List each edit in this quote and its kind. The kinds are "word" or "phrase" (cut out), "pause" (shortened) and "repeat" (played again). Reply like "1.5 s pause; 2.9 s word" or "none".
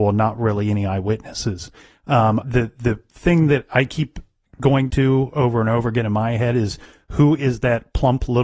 2.4 s word; 4.9 s word